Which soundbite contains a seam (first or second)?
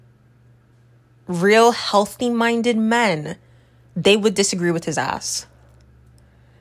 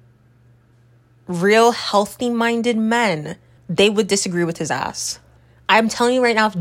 second